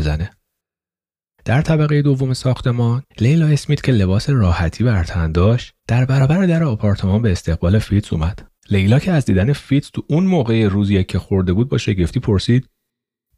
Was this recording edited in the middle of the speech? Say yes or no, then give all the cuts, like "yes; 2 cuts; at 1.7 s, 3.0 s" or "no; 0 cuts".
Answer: yes; 3 cuts; at 3.1 s, 5.8 s, 8.6 s